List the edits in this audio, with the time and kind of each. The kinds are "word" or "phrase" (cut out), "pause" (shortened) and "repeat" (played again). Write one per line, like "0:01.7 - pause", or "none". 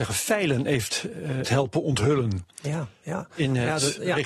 0:01.4 - phrase